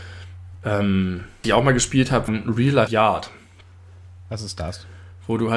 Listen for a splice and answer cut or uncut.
cut